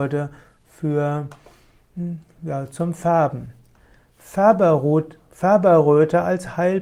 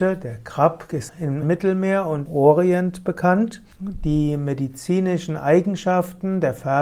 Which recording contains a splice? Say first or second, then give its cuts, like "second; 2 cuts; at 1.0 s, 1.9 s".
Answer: second; 4 cuts; at 1.1 s, 1.4 s, 2.3 s, 3.7 s